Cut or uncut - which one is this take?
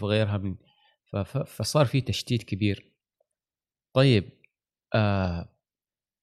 uncut